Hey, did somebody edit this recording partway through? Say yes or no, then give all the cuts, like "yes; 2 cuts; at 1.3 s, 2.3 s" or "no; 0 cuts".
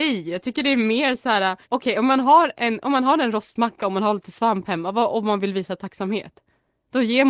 yes; 1 cut; at 1.6 s